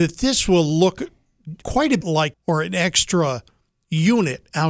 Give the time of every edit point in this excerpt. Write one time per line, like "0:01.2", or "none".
0:01.6
0:02.0
0:02.3